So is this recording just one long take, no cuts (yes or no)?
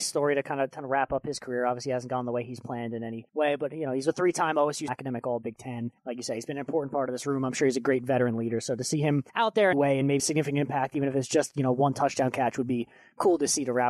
no